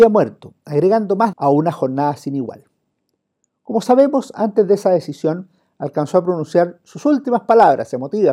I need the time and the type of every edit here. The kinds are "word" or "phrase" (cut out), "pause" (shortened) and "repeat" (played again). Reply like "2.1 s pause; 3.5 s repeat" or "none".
1.3 s word